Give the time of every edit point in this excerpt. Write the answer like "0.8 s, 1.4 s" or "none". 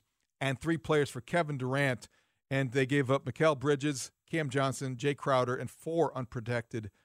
none

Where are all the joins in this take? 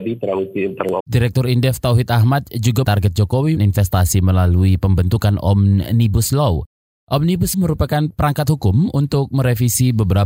1.0 s, 2.8 s, 3.6 s, 7.5 s

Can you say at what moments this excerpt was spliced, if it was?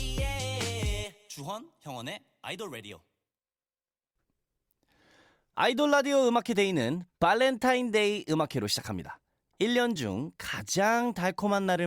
none

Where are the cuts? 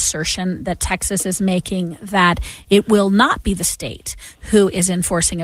none

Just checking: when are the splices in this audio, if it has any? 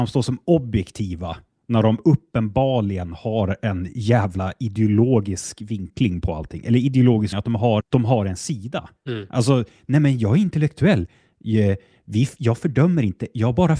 7.3 s, 7.8 s, 9.0 s

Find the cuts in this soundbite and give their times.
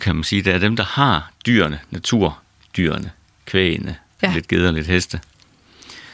4.2 s

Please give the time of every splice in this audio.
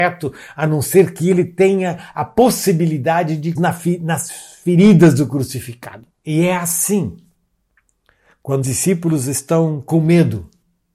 3.6 s, 6.1 s, 8.6 s

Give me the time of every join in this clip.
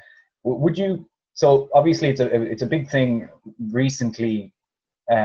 none

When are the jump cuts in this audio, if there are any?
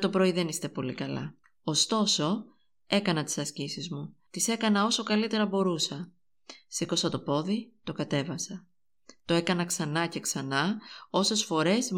1.4 s, 4.3 s

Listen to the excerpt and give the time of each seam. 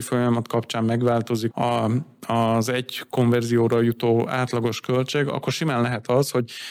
1.5 s

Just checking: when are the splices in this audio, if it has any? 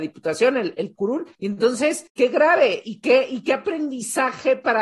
1.3 s, 2.1 s

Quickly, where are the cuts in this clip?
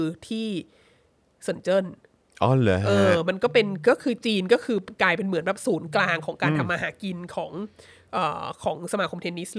none

